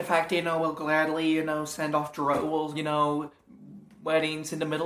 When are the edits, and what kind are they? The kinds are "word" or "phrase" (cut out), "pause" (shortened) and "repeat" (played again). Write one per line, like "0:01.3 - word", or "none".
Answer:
0:02.7 - phrase